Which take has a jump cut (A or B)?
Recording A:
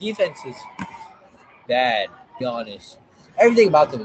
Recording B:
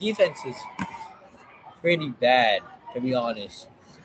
A